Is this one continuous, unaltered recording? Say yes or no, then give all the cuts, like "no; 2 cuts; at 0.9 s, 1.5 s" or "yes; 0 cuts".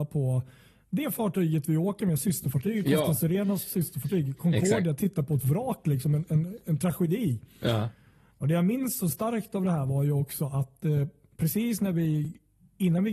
yes; 0 cuts